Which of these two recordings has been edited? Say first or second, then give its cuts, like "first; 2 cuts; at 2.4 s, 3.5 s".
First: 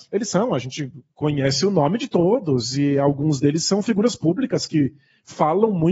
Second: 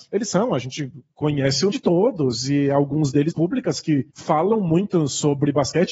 second; 3 cuts; at 1.7 s, 3.3 s, 4.1 s